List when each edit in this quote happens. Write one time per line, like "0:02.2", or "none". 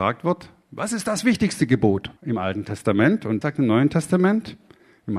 0:02.2
0:03.4